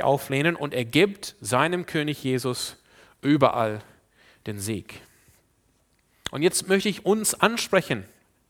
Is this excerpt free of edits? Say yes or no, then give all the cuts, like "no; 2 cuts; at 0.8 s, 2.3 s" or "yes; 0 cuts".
yes; 0 cuts